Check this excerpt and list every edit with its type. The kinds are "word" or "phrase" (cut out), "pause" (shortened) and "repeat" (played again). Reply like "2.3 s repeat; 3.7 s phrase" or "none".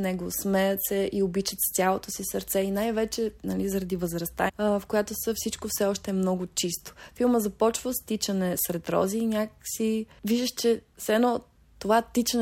4.5 s word